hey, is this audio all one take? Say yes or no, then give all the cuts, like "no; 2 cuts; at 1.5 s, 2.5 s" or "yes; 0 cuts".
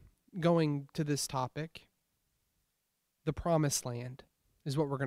yes; 0 cuts